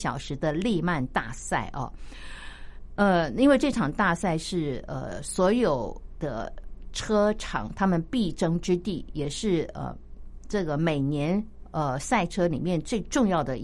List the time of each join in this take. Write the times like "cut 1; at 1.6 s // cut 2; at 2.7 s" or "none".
none